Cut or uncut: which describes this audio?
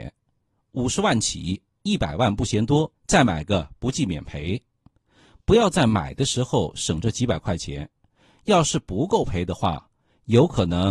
cut